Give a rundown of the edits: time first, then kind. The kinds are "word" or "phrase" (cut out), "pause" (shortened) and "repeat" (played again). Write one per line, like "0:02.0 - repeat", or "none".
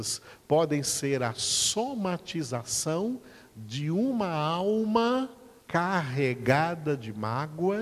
0:05.6 - pause